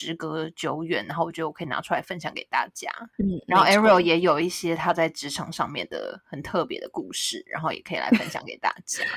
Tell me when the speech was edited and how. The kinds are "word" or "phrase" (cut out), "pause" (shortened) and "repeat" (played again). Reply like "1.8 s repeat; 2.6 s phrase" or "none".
3.1 s pause